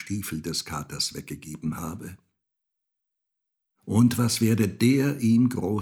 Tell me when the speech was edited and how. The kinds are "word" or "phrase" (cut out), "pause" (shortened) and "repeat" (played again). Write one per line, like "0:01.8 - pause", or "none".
none